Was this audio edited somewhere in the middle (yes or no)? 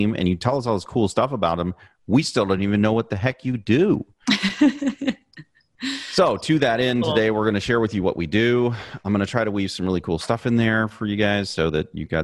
no